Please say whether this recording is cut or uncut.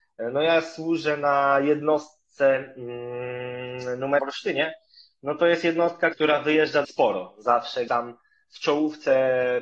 cut